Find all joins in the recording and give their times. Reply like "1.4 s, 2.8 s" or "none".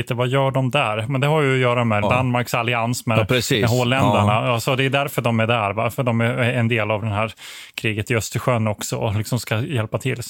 2.0 s